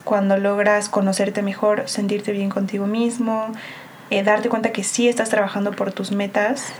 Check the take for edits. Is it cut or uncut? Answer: uncut